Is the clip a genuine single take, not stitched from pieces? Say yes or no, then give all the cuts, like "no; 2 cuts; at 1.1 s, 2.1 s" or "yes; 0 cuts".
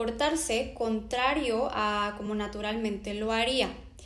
yes; 0 cuts